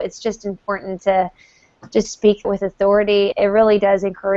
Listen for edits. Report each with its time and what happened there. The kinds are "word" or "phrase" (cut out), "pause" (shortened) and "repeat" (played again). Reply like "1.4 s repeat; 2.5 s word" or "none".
1.0 s word; 2.0 s word; 2.4 s word; 3.3 s word